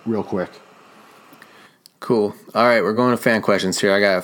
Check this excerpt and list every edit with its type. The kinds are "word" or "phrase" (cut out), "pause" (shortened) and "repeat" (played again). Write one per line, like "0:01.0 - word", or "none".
none